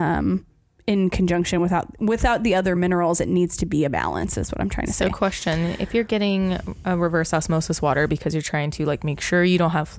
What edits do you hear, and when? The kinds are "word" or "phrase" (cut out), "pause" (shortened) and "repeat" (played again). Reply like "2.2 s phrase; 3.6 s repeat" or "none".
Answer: none